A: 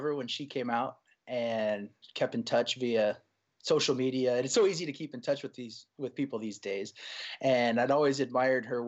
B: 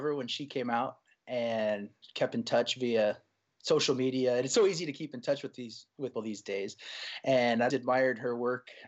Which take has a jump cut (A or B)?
B